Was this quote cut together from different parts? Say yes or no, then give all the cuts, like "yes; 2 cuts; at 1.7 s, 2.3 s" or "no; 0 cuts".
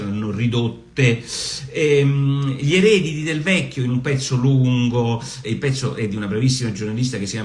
yes; 1 cut; at 5.4 s